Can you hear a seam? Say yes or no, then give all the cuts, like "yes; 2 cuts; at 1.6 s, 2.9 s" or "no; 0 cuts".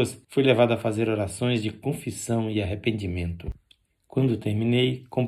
no; 0 cuts